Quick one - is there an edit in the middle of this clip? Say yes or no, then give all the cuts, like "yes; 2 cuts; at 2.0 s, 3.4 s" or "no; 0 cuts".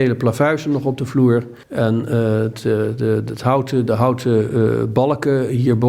yes; 1 cut; at 1.6 s